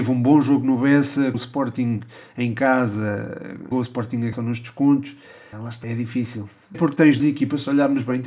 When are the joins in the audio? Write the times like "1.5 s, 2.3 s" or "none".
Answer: 1.3 s, 3.7 s, 4.3 s, 5.5 s, 5.8 s, 6.7 s, 7.2 s